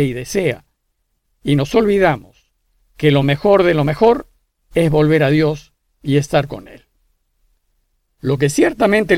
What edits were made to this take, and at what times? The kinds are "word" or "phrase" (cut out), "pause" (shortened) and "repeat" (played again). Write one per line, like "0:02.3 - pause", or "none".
none